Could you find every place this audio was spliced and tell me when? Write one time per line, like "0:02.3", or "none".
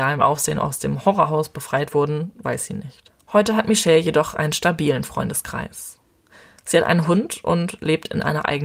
none